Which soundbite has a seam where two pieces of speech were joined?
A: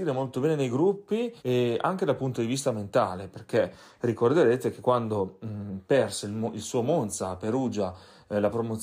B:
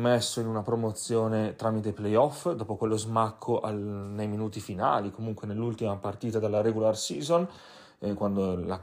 A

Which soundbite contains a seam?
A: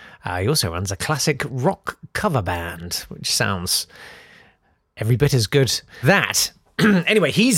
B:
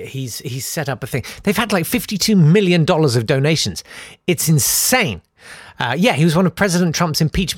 A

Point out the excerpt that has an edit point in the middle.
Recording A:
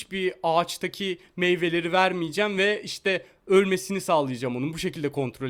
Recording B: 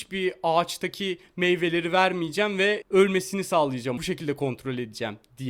B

